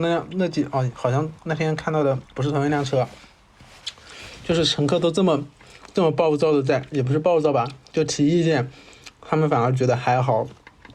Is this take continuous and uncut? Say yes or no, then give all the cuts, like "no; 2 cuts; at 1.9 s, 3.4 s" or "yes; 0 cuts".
no; 2 cuts; at 1.4 s, 2.3 s